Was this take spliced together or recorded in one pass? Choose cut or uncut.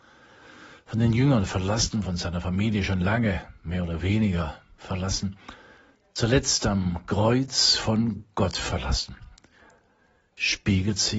uncut